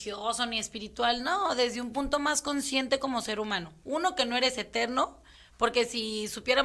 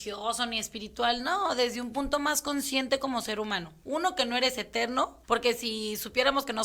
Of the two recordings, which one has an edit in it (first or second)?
second